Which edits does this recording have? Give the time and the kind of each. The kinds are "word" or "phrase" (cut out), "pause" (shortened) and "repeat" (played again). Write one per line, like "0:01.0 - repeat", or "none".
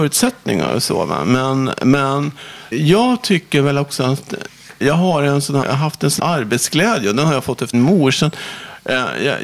0:02.7 - word
0:04.8 - word
0:05.6 - word
0:06.2 - word
0:07.7 - word